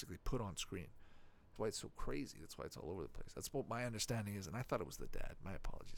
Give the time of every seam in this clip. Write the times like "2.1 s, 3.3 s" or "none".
1.6 s